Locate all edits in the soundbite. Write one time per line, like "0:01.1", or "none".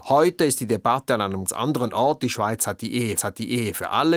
0:01.5
0:03.2